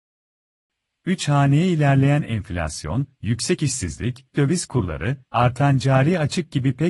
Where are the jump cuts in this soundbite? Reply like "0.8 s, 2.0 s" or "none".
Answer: 4.3 s